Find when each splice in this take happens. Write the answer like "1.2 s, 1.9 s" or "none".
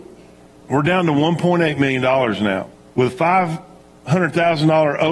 2.9 s